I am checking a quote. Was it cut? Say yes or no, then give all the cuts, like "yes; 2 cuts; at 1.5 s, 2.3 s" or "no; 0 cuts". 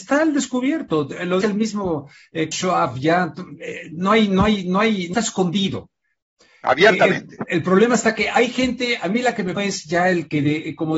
yes; 4 cuts; at 1.4 s, 2.5 s, 5.1 s, 9.6 s